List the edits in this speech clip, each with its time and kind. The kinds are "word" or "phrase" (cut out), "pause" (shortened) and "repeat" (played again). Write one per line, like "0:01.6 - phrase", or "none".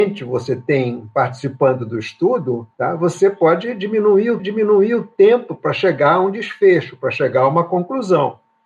0:02.7 - pause
0:04.4 - repeat

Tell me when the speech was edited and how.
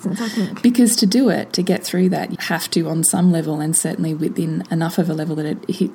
0:02.3 - word

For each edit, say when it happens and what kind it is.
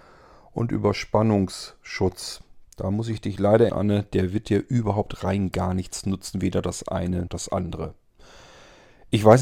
0:03.7 - word
0:07.3 - word

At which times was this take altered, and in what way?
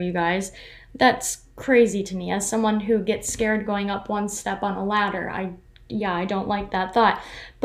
none

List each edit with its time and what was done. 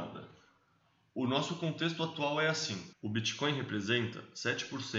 0:02.9 - pause

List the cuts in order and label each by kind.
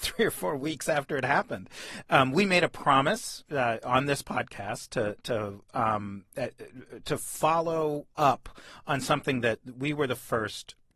0:08.1 - pause

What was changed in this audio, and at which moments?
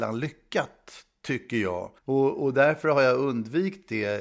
0:02.0 - pause

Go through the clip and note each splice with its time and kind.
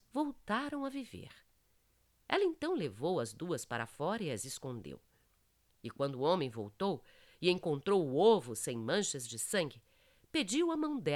none

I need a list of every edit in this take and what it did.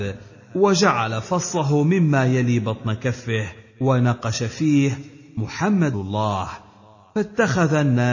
0:03.7 - pause
0:05.9 - word

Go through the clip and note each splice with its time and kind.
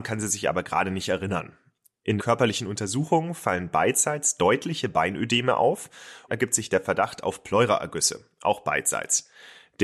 0:02.2 - word
0:06.3 - phrase

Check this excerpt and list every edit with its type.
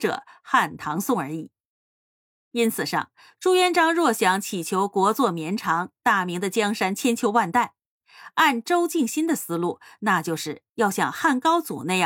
none

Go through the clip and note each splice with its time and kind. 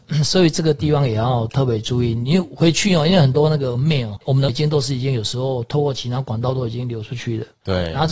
0:04.2 - word
0:04.5 - word

